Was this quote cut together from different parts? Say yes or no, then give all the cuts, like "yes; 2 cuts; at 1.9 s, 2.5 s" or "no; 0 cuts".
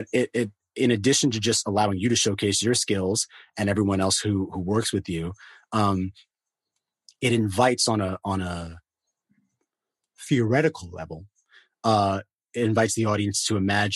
no; 0 cuts